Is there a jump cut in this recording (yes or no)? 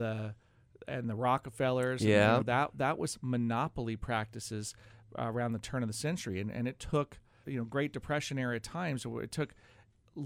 yes